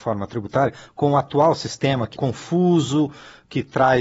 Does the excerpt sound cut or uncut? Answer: cut